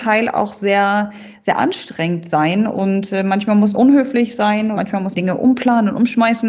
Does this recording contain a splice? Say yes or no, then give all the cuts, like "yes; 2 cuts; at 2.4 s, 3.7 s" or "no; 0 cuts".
yes; 3 cuts; at 3.7 s, 4.7 s, 5.1 s